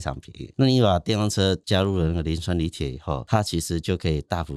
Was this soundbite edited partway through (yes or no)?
no